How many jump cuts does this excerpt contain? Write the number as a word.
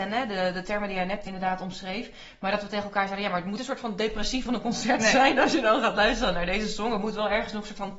three